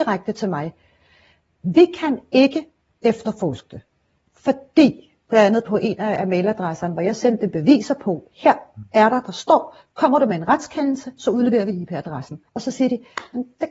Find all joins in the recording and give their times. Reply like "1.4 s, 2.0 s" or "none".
12.5 s